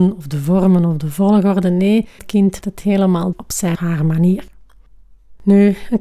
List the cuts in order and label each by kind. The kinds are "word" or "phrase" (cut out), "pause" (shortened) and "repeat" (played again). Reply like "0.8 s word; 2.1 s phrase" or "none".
2.2 s word; 2.6 s word; 3.3 s word; 3.8 s word